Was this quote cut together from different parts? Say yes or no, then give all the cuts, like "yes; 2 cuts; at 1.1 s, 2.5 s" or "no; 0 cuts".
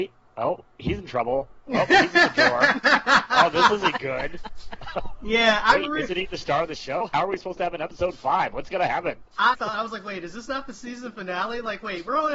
yes; 1 cut; at 9.5 s